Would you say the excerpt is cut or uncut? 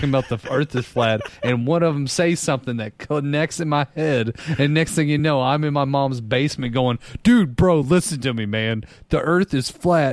uncut